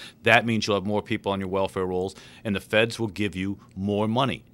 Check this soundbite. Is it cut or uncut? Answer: uncut